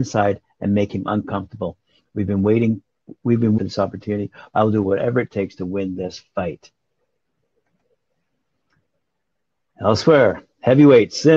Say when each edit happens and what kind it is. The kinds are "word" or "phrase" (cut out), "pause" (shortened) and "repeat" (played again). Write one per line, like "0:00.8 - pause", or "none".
0:03.6 - phrase